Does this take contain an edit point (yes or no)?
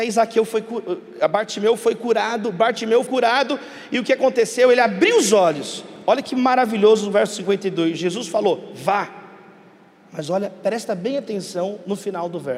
yes